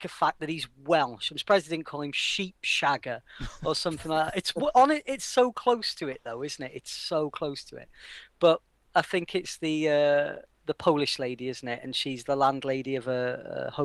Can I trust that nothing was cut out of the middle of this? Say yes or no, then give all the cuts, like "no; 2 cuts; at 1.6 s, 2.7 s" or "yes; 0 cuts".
yes; 0 cuts